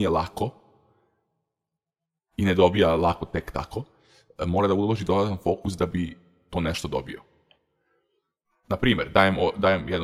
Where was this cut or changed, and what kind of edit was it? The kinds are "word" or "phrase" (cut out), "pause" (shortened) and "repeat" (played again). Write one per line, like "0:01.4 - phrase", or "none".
none